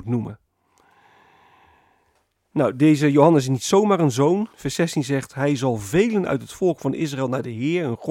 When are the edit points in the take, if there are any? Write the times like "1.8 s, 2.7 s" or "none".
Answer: 4.5 s